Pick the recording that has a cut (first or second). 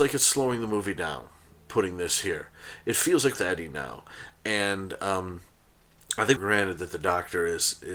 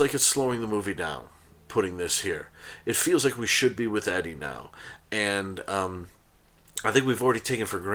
first